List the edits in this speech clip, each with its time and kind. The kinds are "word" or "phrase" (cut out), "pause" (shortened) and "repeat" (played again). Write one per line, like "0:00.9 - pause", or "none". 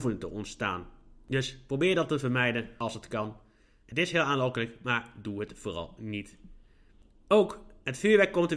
none